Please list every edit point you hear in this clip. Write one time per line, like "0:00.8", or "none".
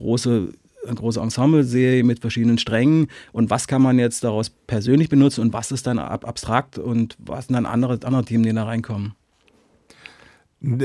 none